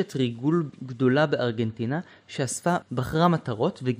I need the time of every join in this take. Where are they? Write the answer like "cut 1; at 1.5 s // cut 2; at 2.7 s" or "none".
cut 1; at 2.8 s